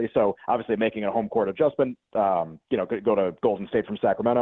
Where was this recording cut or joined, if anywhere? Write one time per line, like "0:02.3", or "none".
0:02.1